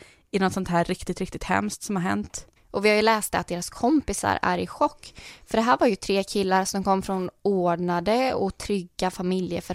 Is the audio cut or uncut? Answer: uncut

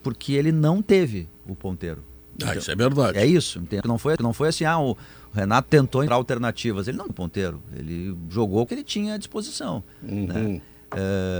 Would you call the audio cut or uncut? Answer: cut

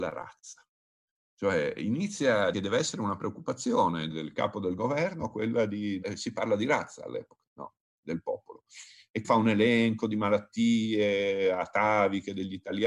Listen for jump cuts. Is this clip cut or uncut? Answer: cut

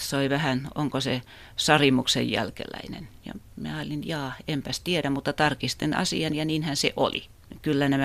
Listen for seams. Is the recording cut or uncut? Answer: cut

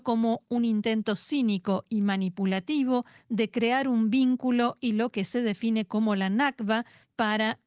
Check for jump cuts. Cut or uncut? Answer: uncut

